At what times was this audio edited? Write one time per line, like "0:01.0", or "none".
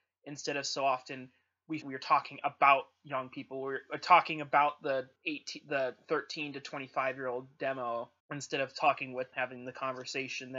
0:01.8
0:05.2
0:08.2
0:09.3